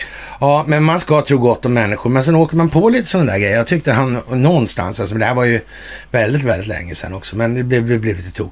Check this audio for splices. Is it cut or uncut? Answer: uncut